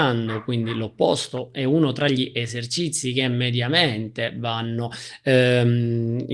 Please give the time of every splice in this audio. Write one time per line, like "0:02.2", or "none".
none